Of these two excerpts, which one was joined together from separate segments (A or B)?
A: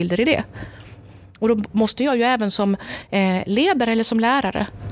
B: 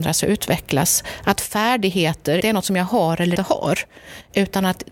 B